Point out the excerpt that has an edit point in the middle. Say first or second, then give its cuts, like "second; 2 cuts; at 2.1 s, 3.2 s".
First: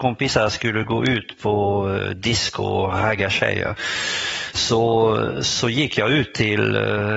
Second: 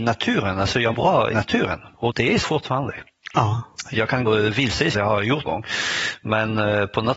second; 6 cuts; at 0.9 s, 1.3 s, 2.4 s, 4.2 s, 4.9 s, 5.4 s